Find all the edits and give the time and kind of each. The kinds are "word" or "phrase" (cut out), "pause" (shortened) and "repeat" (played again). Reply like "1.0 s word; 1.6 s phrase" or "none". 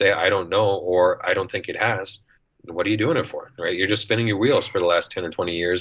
2.3 s pause

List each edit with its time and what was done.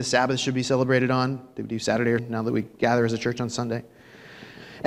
2.2 s word

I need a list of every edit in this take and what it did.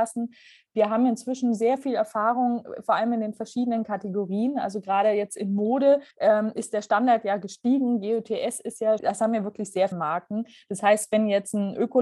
6.1 s pause; 9.0 s word; 9.9 s word

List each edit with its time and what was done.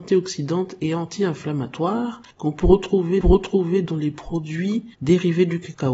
2.3 s pause; 3.2 s repeat; 4.9 s pause

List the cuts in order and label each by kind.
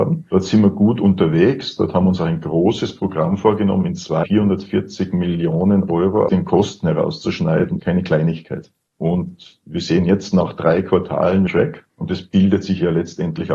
4.2 s word; 6.3 s word; 7.8 s word; 11.5 s phrase

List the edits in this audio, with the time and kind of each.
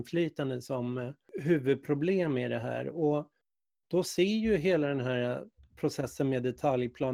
none

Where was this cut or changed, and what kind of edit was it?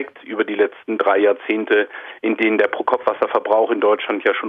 none

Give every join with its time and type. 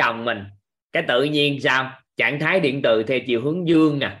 2.1 s pause

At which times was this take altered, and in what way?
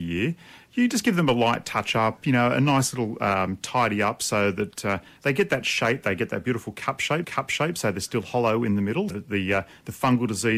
7.2 s repeat; 9.1 s word

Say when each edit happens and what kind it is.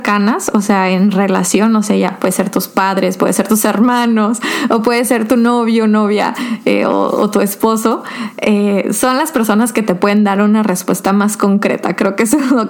none

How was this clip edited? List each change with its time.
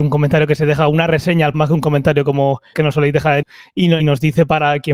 1.5 s word; 2.7 s word; 3.4 s word; 4.0 s word

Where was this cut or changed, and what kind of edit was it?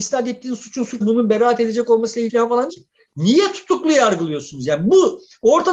1.0 s word; 2.3 s word; 2.7 s word

